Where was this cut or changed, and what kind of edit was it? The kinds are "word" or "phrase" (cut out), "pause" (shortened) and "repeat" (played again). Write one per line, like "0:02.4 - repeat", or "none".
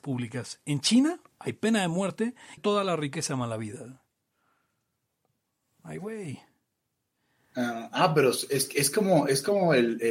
0:02.6 - phrase